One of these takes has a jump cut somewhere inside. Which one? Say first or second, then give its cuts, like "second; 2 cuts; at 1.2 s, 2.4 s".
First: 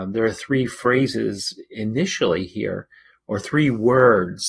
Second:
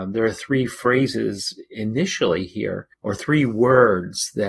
second; 1 cut; at 2.9 s